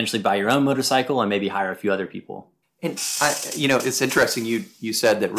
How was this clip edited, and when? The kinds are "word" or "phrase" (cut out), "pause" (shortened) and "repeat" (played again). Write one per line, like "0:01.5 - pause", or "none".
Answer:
0:02.6 - pause